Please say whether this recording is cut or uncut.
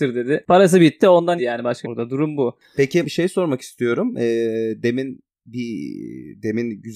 cut